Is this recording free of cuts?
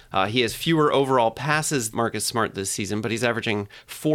no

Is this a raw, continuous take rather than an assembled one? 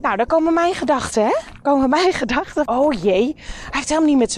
no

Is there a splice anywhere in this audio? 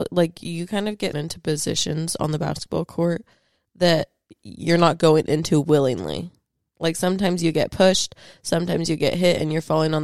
yes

